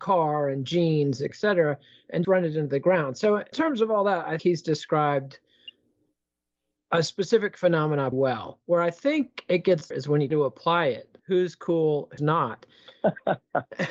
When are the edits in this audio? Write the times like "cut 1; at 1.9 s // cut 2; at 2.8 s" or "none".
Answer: cut 1; at 1.3 s // cut 2; at 2.2 s // cut 3; at 3.5 s // cut 4; at 4.4 s // cut 5; at 8.1 s // cut 6; at 9.9 s // cut 7; at 10.3 s // cut 8; at 11.2 s // cut 9; at 12.2 s